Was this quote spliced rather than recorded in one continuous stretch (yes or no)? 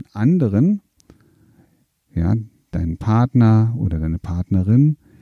no